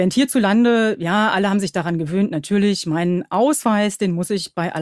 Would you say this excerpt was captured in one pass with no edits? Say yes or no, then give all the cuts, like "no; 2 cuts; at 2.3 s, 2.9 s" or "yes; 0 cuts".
yes; 0 cuts